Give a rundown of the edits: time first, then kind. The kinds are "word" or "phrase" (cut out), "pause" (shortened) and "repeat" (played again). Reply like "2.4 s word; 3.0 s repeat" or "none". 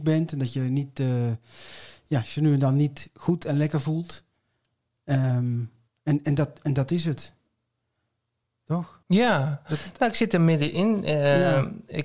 9.0 s pause